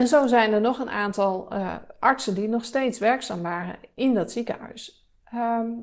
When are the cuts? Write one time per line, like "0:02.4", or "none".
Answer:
none